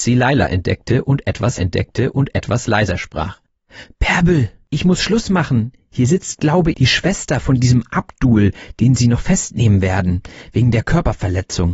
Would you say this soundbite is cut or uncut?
cut